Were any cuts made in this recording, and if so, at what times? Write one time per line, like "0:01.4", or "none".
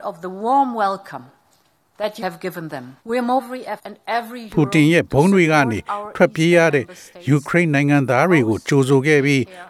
0:02.2
0:03.0
0:03.4
0:03.8

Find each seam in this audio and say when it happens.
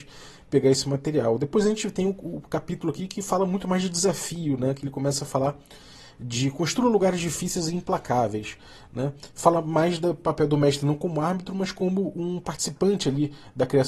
none

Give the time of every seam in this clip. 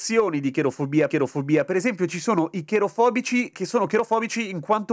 0:01.1
0:03.5

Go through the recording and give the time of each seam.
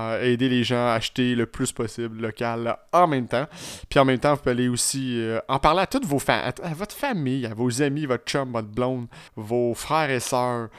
0:09.3

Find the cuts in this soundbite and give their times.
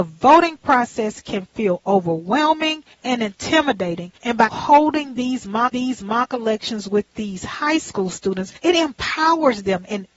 0:02.9
0:04.2
0:04.5
0:05.7
0:08.6

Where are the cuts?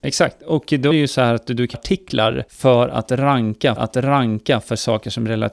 0:00.9
0:01.7
0:02.5
0:03.8

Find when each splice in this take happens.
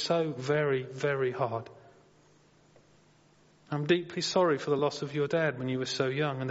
none

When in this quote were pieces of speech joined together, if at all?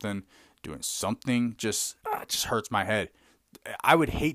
0:02.0

